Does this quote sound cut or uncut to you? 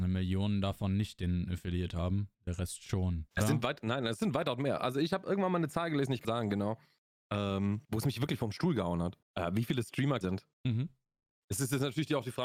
cut